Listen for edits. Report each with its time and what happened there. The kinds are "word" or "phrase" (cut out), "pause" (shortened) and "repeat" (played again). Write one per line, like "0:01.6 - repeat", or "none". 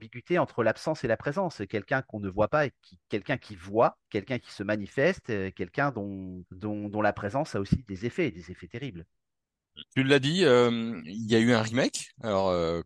0:04.1 - pause
0:06.5 - pause
0:09.9 - pause